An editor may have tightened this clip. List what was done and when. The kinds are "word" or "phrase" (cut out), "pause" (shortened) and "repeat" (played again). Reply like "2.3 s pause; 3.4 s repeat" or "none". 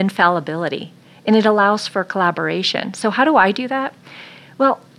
none